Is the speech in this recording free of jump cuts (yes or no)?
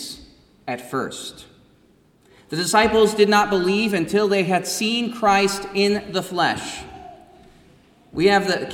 yes